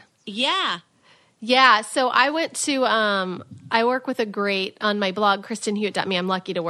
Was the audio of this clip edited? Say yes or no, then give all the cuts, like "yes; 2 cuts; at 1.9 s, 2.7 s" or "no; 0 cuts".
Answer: no; 0 cuts